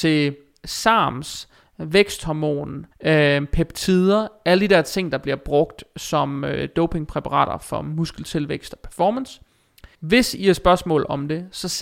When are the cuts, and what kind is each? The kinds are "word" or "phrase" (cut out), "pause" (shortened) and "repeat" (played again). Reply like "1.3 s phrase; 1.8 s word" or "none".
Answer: 2.9 s pause; 9.9 s pause